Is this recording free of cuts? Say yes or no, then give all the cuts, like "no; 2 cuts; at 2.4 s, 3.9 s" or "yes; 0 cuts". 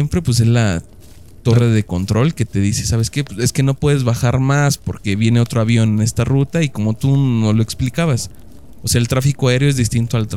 yes; 0 cuts